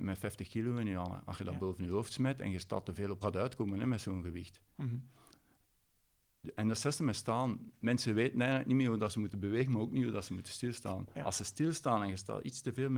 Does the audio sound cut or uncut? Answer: cut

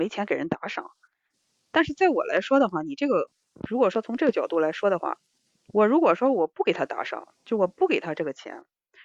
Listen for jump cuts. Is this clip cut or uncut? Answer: uncut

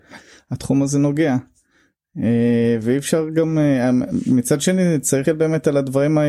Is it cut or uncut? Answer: cut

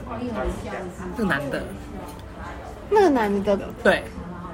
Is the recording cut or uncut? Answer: cut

